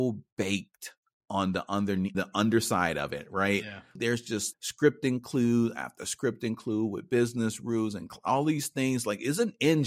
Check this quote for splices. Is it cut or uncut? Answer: cut